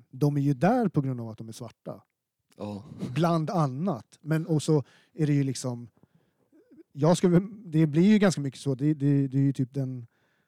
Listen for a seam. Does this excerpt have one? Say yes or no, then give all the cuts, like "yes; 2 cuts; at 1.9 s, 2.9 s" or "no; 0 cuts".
no; 0 cuts